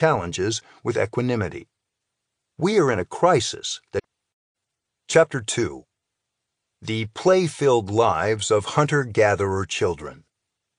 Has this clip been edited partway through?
no; 0 cuts

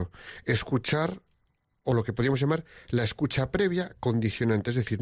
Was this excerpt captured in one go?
yes; 0 cuts

